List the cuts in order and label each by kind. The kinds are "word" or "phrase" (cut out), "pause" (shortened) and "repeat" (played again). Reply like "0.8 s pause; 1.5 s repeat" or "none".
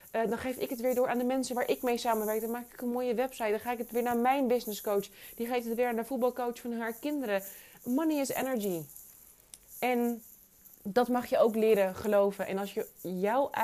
10.7 s pause